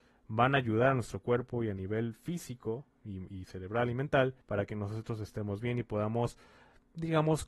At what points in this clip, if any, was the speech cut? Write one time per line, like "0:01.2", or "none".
0:04.4